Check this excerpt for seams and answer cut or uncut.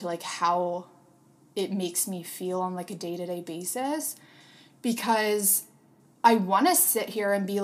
uncut